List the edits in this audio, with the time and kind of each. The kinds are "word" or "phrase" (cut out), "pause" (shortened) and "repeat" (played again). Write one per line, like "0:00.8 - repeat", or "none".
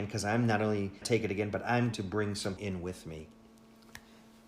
0:01.0 - word
0:01.9 - word
0:02.6 - word